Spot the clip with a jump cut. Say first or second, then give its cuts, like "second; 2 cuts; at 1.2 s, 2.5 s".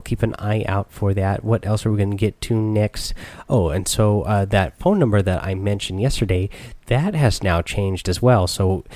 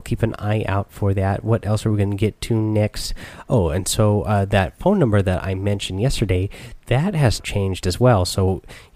second; 1 cut; at 7.4 s